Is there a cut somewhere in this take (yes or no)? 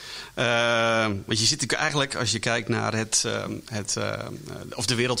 no